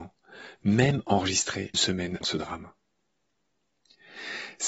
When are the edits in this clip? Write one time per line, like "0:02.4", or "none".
0:01.7
0:02.2

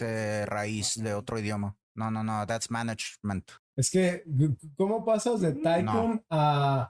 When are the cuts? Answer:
0:01.8

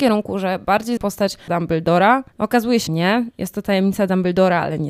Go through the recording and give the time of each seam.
0:01.0
0:01.5
0:02.3
0:02.9

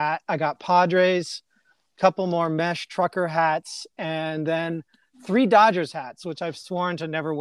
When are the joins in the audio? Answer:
none

